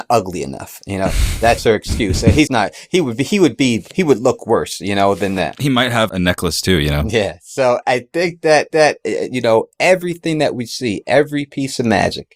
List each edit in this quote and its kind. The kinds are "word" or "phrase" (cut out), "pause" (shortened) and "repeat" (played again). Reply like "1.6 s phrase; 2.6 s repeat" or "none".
2.5 s word; 6.1 s word; 7.8 s word; 8.7 s repeat